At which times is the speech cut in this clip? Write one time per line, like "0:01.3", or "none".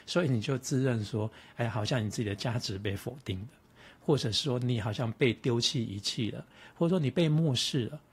none